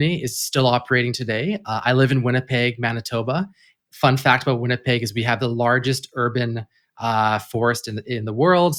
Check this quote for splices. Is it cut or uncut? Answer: uncut